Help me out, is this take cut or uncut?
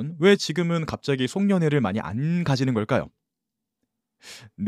uncut